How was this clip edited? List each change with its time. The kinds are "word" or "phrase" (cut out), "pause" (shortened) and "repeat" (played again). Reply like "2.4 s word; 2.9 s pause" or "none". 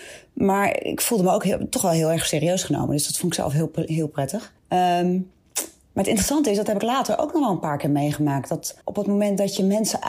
4.6 s pause; 8.8 s pause